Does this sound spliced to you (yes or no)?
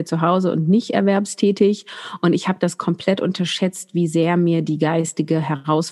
no